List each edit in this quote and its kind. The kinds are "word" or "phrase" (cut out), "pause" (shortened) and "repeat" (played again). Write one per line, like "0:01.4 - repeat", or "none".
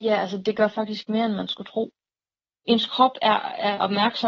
none